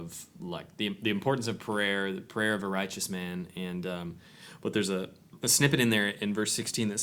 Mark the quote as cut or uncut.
uncut